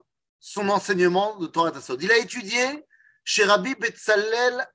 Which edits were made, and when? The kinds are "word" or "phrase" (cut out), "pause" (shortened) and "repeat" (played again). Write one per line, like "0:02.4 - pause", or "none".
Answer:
none